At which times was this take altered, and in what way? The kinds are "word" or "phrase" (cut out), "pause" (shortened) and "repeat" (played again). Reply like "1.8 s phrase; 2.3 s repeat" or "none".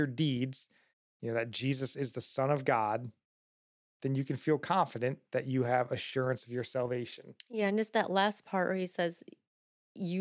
none